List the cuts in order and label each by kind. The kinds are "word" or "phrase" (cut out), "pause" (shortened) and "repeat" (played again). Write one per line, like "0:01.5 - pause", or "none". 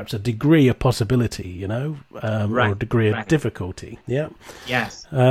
0:04.0 - pause